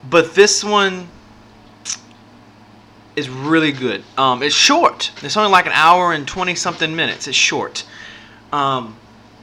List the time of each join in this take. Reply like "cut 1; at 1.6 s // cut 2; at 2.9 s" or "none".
none